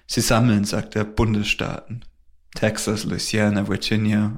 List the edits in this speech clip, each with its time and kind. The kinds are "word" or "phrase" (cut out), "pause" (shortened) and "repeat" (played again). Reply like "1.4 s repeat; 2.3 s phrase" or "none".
none